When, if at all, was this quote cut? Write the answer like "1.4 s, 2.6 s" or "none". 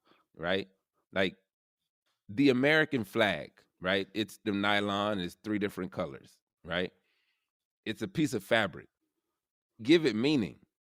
3.7 s, 4.4 s, 9.8 s